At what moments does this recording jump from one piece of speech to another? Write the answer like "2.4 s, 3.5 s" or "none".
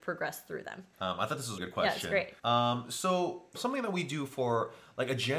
0.9 s, 1.6 s, 2.4 s, 3.5 s